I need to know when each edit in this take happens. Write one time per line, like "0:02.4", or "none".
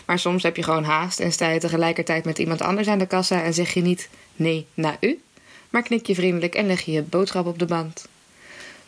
none